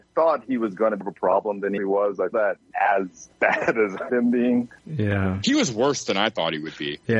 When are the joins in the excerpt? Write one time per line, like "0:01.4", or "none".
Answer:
0:01.0
0:01.8
0:02.3
0:02.7
0:03.3
0:04.1
0:04.8